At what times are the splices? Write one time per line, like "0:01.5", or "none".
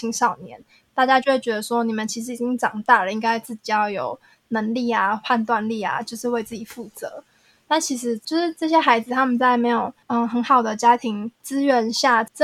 none

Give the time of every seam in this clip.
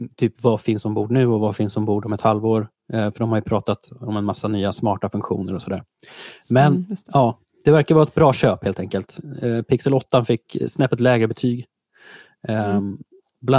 none

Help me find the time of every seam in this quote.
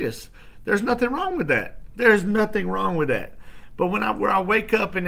none

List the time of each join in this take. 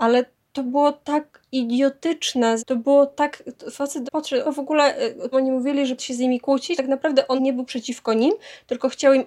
0:02.6
0:04.1
0:04.4
0:05.3
0:06.0
0:06.8
0:07.4

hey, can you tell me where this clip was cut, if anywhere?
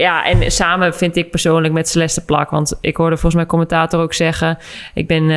none

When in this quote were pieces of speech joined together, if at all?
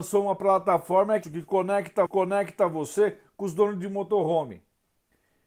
0:01.2
0:02.1

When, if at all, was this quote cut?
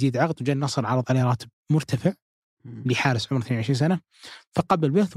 none

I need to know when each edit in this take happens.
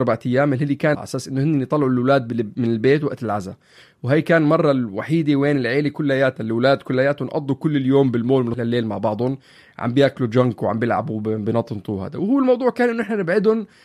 0:00.9
0:08.5

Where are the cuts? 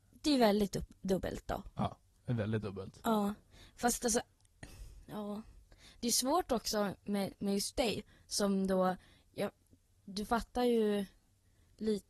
none

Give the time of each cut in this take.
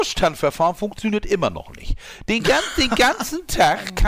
none

